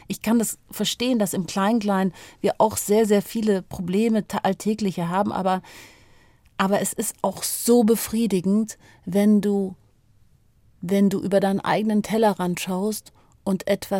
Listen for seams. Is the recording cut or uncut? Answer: uncut